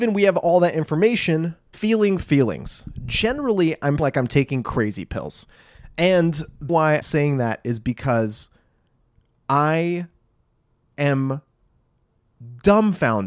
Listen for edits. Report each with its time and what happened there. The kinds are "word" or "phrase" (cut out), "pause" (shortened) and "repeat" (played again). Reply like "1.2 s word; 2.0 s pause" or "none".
1.7 s word; 2.2 s word; 4.0 s word; 6.7 s word; 7.0 s word